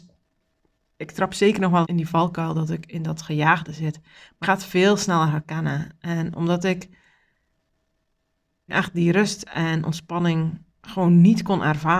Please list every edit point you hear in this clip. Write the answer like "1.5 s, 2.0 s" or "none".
1.8 s, 4.4 s, 8.7 s, 10.7 s

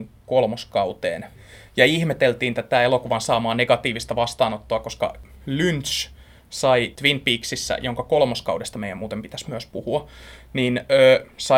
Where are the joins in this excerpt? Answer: none

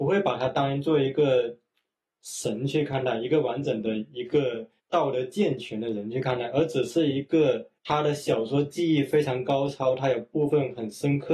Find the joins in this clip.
4.8 s, 7.8 s

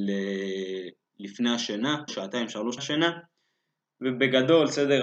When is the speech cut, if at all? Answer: 2.1 s, 2.8 s

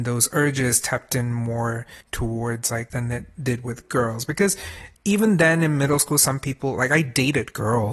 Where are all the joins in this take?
2.0 s, 2.9 s, 4.9 s

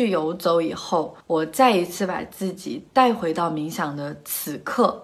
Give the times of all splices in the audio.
1.2 s

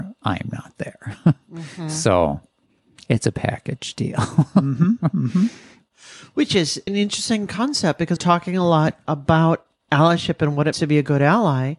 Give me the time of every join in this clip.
6.9 s, 8.2 s, 10.7 s

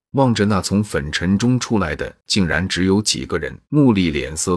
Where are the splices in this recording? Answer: 3.6 s

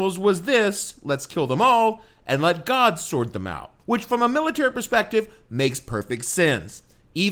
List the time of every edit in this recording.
3.8 s

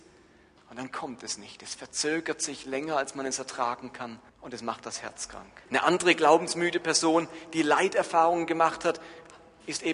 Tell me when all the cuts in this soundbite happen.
4.3 s, 5.7 s

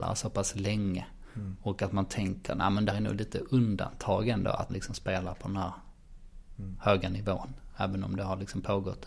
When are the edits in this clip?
2.9 s, 4.7 s

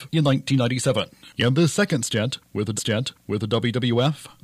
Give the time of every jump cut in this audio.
2.8 s

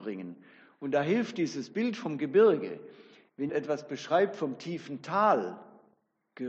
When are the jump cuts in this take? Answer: 3.5 s

